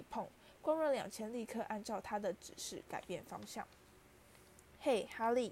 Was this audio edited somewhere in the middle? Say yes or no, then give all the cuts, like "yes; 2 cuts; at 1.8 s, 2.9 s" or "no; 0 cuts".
no; 0 cuts